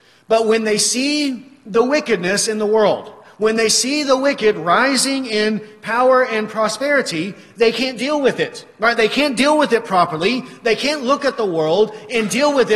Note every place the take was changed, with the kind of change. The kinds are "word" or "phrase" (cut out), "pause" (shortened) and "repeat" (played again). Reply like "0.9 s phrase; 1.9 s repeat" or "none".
none